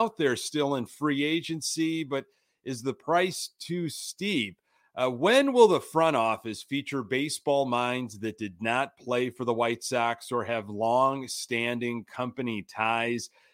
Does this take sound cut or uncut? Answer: uncut